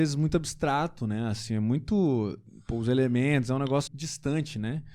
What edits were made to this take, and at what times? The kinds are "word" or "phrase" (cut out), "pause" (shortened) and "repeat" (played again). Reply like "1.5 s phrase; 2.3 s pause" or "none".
3.9 s word